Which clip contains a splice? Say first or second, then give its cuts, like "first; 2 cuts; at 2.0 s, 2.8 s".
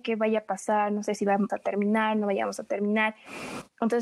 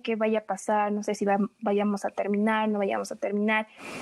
first; 1 cut; at 1.5 s